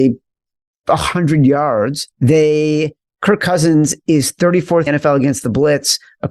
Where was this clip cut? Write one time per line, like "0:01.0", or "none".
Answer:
0:02.1
0:04.9